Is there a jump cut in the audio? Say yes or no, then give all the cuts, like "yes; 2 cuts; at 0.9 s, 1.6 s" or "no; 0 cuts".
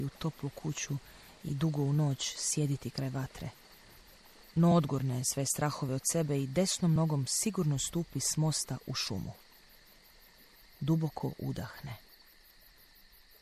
no; 0 cuts